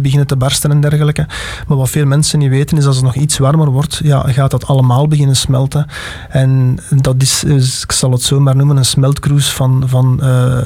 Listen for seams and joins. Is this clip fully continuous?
yes; 0 cuts

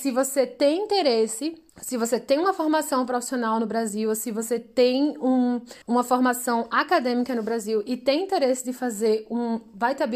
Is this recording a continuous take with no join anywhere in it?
no; 2 cuts; at 1.7 s, 5.8 s

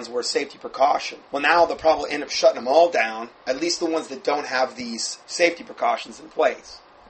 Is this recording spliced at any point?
yes; 3 cuts; at 1.3 s, 3.4 s, 5.2 s

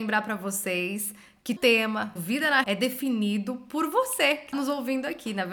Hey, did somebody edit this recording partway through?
yes; 4 cuts; at 1.6 s, 2.2 s, 2.6 s, 4.5 s

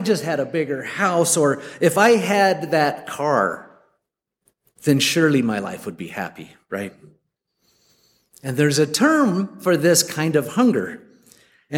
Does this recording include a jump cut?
no; 0 cuts

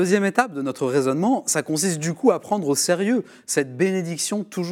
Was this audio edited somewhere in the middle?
no; 0 cuts

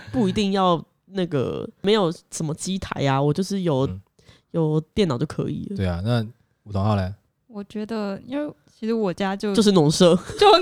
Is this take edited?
no; 0 cuts

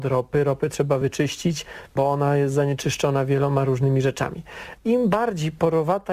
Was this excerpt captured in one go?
yes; 0 cuts

